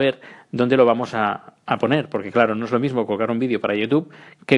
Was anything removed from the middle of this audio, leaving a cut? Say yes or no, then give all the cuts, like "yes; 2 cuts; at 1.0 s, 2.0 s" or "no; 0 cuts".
no; 0 cuts